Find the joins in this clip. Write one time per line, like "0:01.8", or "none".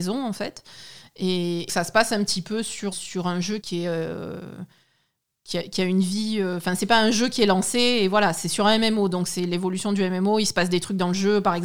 0:01.7
0:02.9
0:03.6

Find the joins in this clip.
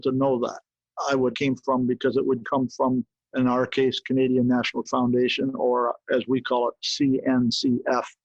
0:01.3
0:02.4
0:03.1
0:04.8

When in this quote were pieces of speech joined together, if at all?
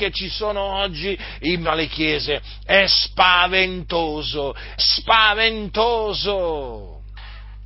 0:01.6
0:04.8

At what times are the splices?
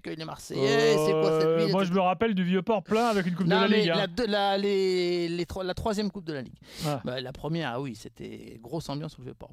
none

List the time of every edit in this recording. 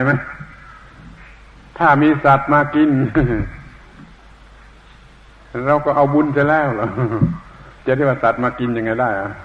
0:07.8

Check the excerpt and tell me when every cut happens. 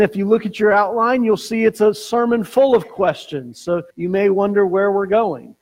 0:03.9

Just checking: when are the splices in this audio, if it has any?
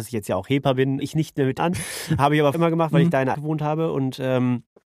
0:01.0
0:01.6
0:02.5
0:03.3

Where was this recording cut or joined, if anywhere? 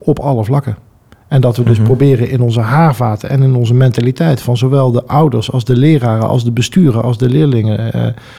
none

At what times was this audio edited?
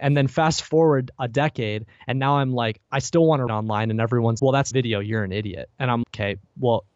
0:02.9
0:03.5
0:04.4
0:04.7
0:06.0

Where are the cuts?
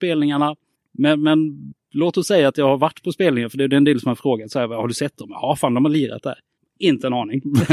none

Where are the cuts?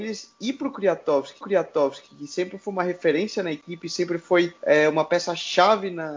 0:01.4
0:04.6

